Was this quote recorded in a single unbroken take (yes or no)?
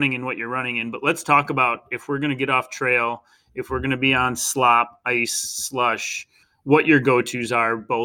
yes